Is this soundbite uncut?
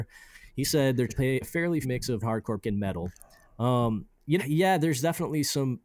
no; 6 cuts; at 1.1 s, 1.4 s, 1.8 s, 2.2 s, 2.6 s, 4.4 s

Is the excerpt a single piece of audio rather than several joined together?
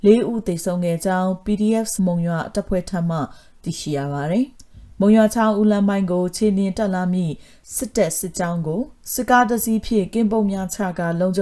no; 2 cuts; at 2.0 s, 4.5 s

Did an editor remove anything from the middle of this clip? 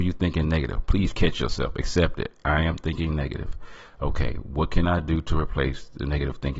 no; 0 cuts

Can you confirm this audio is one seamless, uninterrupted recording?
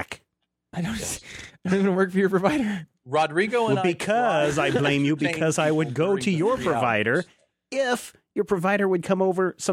yes; 0 cuts

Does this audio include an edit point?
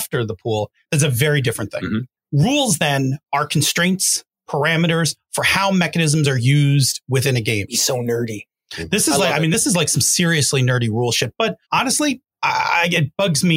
yes; 1 cut; at 11.6 s

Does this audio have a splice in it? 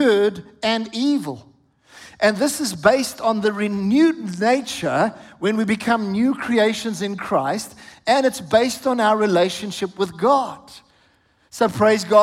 no; 0 cuts

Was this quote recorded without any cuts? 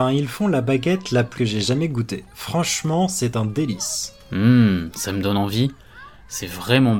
no; 1 cut; at 1.3 s

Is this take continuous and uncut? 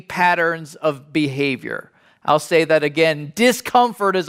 yes; 0 cuts

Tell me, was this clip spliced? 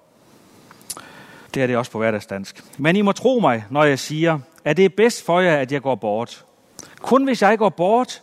yes; 2 cuts; at 1.5 s, 2.7 s

